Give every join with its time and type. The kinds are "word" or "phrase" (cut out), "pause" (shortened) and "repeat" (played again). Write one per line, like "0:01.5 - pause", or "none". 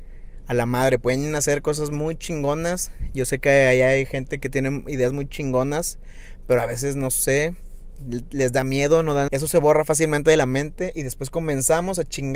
0:09.3 - phrase